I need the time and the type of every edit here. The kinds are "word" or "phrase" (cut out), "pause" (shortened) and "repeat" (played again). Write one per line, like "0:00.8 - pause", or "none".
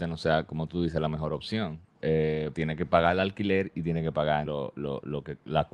0:02.5 - word
0:04.5 - word